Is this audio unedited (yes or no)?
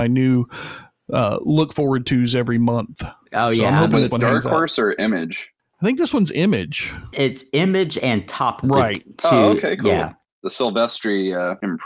no